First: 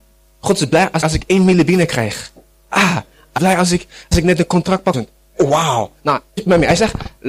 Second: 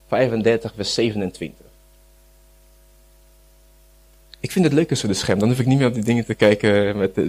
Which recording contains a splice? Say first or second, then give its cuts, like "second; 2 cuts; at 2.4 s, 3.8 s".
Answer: first; 5 cuts; at 1.0 s, 3.4 s, 4.1 s, 4.9 s, 6.4 s